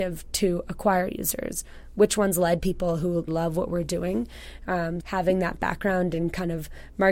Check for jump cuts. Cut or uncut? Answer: cut